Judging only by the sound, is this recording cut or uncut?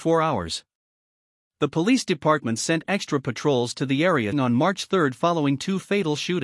cut